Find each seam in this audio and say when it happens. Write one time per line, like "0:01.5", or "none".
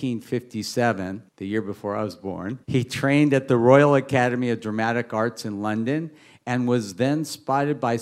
0:01.3
0:02.6